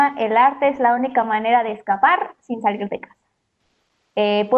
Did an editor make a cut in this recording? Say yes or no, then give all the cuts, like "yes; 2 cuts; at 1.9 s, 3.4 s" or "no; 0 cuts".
no; 0 cuts